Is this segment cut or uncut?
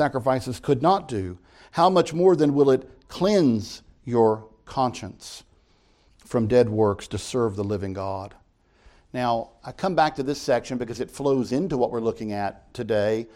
uncut